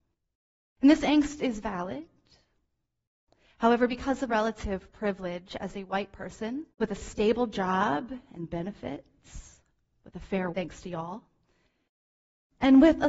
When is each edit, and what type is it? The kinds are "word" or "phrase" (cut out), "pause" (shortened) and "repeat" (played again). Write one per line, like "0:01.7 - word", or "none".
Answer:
0:04.3 - word
0:06.7 - pause
0:10.5 - word